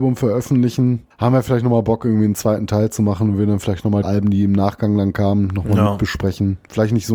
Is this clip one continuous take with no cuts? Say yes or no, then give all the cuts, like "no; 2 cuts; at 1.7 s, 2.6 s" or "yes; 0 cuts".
no; 2 cuts; at 1.1 s, 4.0 s